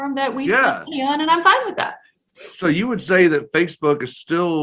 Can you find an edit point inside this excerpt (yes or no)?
no